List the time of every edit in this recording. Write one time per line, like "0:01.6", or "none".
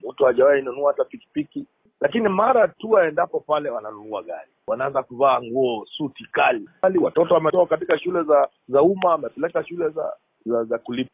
0:08.6